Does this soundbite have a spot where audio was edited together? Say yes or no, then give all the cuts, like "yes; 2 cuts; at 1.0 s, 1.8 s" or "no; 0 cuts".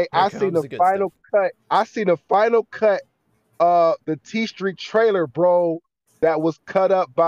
yes; 1 cut; at 1.6 s